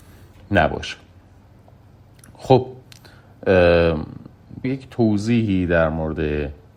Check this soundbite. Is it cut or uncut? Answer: cut